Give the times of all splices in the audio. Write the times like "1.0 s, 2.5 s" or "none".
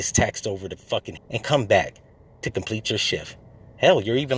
1.2 s